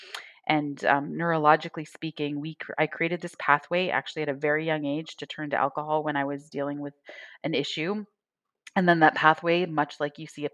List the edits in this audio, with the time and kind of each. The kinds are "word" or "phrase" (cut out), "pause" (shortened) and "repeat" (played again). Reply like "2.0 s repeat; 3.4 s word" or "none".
none